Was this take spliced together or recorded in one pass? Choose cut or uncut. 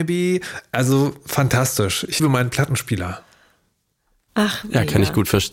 cut